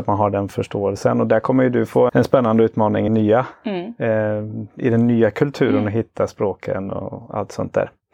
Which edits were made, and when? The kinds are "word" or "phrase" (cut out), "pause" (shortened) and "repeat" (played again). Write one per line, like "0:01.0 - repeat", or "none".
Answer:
0:02.1 - word
0:03.1 - word

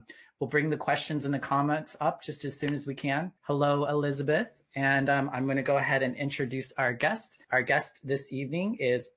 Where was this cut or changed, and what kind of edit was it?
0:03.4 - pause
0:07.4 - pause

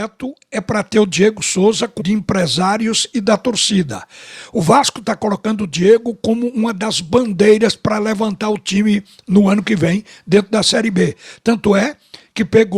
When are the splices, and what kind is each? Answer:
0:02.0 - word

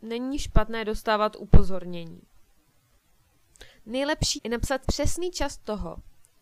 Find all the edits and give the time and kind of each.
0:04.4 - word
0:04.8 - word

